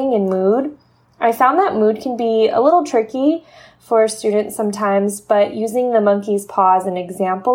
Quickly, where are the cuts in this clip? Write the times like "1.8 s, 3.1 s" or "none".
none